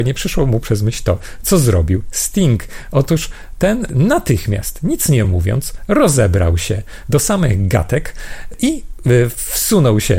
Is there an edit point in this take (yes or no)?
no